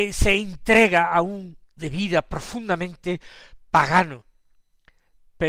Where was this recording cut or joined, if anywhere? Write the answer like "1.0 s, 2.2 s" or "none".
1.8 s